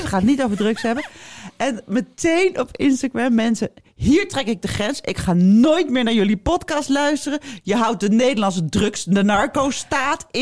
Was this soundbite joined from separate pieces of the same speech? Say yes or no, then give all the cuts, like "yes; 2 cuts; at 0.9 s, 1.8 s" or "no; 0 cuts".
no; 0 cuts